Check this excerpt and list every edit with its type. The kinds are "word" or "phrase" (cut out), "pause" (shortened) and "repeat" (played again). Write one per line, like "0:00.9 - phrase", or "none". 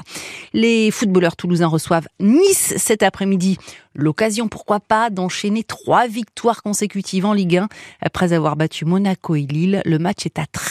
none